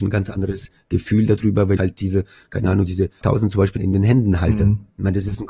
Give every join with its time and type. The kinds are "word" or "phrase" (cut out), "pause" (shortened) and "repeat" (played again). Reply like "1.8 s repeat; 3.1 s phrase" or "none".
1.8 s word; 3.2 s word; 3.8 s word